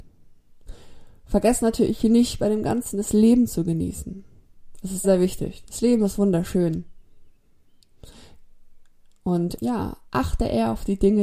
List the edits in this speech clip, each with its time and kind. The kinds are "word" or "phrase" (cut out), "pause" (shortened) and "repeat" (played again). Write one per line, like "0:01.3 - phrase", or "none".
0:05.0 - word
0:09.6 - word
0:10.1 - pause